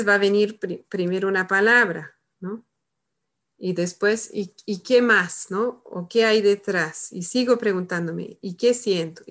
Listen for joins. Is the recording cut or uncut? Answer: uncut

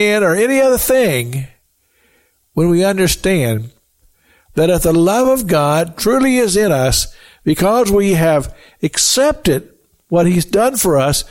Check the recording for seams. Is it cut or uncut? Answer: uncut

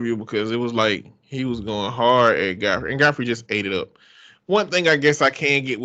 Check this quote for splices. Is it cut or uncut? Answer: uncut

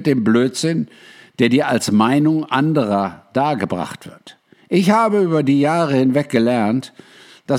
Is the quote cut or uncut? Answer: uncut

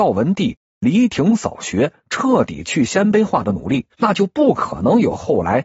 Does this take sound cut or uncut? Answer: cut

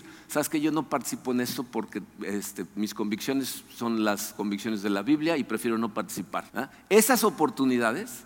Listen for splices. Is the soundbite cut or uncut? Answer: cut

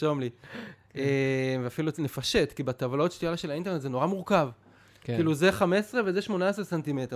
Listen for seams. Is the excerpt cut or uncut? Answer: uncut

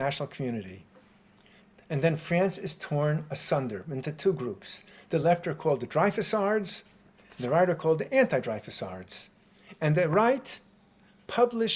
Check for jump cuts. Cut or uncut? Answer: uncut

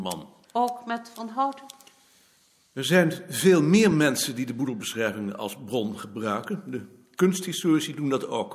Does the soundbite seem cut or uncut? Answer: uncut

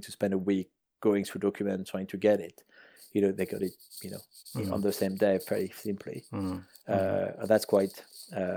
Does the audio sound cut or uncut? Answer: uncut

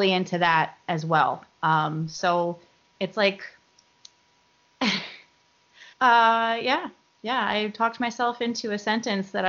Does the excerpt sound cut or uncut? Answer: cut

